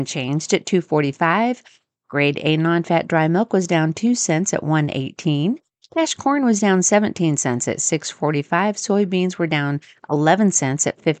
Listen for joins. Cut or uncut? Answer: uncut